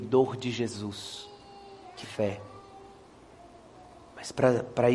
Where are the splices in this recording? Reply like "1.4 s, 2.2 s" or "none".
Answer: 2.0 s